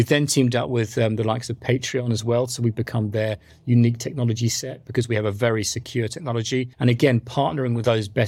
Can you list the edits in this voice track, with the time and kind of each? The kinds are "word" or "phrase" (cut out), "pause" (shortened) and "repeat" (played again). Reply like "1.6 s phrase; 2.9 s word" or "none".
6.7 s pause